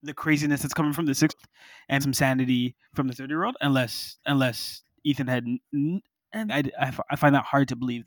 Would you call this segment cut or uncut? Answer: cut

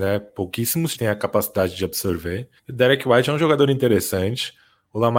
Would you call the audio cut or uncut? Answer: cut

